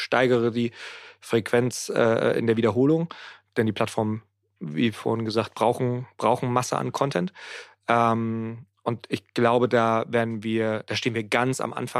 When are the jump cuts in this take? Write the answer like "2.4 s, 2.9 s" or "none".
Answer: none

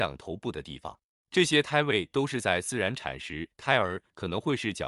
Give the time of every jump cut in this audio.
1.1 s

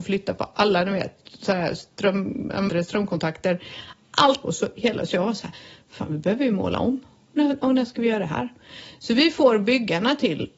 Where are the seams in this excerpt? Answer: 2.7 s, 4.4 s

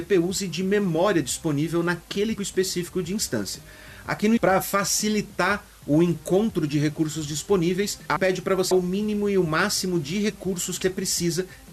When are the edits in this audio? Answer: 2.4 s, 4.4 s, 8.2 s, 8.7 s, 10.8 s

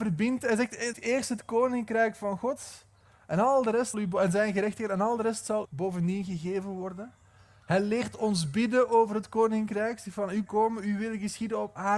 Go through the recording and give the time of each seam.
0.9 s, 3.9 s, 5.6 s, 10.5 s

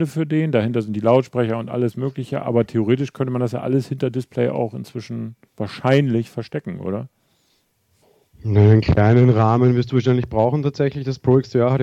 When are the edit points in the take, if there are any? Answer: 5.5 s, 8.0 s

